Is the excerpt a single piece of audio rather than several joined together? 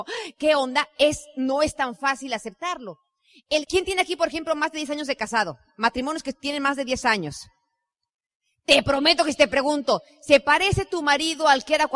yes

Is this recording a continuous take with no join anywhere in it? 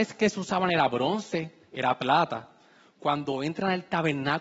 yes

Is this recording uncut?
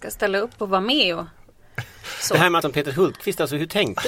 no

